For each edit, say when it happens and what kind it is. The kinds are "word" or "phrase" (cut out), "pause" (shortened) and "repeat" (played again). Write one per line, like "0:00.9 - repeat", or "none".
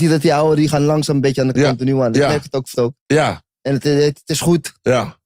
0:01.5 - phrase
0:02.7 - word